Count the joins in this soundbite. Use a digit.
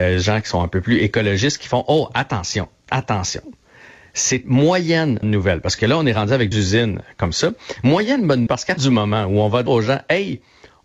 6